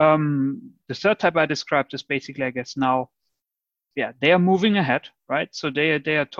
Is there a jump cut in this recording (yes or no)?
no